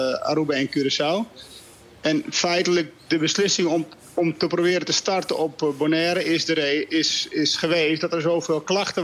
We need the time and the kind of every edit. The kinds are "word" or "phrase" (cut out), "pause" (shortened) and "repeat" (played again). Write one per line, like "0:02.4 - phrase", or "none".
none